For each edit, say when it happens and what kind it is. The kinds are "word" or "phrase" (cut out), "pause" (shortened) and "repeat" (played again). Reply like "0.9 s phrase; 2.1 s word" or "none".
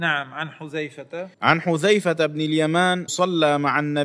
1.3 s pause; 3.1 s word